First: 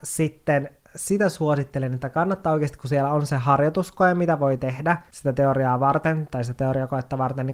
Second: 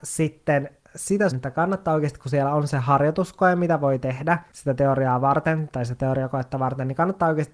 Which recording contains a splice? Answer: second; 1 cut; at 1.3 s

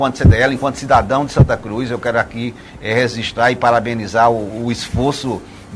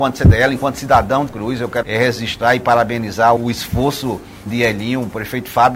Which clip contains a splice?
second; 4 cuts; at 1.3 s, 1.8 s, 3.4 s, 4.5 s

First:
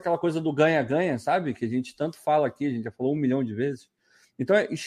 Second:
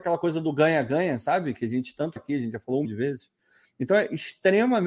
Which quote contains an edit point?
second; 2 cuts; at 2.2 s, 2.8 s

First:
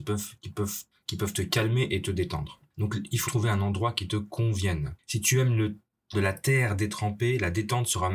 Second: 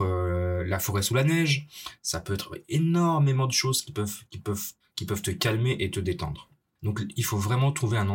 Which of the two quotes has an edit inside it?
first; 3 cuts; at 2.7 s, 3.3 s, 6.1 s

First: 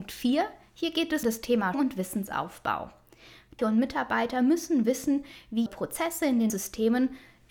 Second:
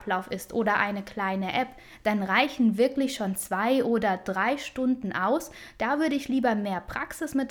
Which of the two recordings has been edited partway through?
first; 5 cuts; at 1.2 s, 1.7 s, 3.6 s, 5.7 s, 6.5 s

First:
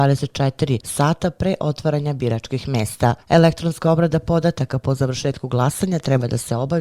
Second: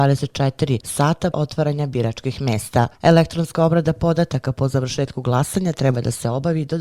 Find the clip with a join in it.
second; 1 cut; at 1.3 s

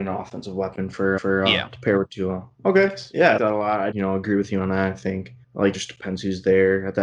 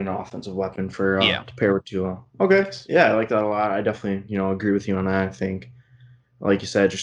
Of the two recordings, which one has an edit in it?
first; 5 cuts; at 1.2 s, 3.4 s, 3.9 s, 5.4 s, 5.7 s

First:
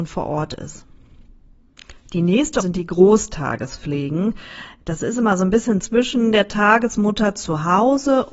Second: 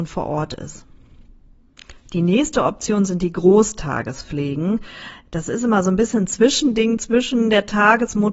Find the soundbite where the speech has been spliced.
first; 2 cuts; at 2.6 s, 5.8 s

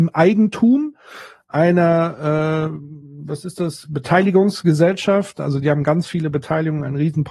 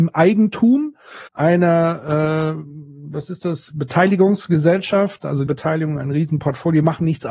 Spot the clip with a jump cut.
second; 2 cuts; at 1.3 s, 5.5 s

